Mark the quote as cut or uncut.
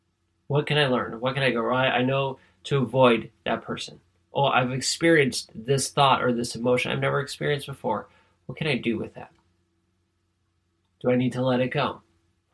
uncut